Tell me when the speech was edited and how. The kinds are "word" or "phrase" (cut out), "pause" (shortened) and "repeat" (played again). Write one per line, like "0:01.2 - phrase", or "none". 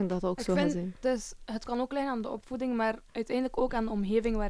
0:03.1 - pause